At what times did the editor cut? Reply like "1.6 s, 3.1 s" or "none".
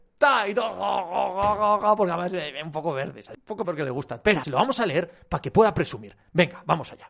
3.3 s, 3.6 s, 4.4 s